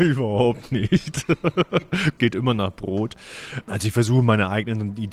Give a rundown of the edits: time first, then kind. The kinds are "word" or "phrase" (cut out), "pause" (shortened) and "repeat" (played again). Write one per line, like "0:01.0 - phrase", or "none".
0:02.2 - word